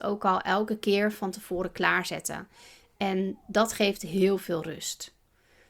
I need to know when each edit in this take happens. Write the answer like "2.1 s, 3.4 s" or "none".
none